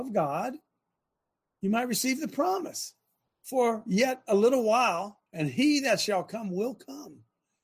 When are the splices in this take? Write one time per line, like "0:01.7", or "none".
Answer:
0:03.3
0:05.3